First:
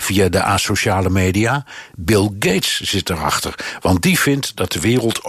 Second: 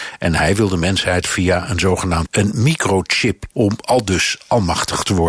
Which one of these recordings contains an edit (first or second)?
second